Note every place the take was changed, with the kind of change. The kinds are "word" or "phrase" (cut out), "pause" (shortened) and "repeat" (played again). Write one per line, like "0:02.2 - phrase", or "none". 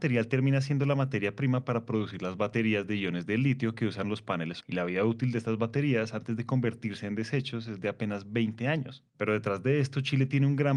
0:04.6 - word
0:09.1 - pause